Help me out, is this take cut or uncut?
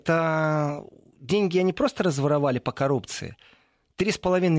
uncut